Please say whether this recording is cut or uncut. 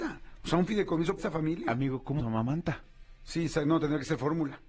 cut